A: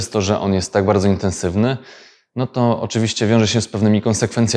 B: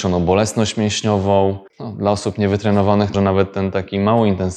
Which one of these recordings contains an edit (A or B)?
B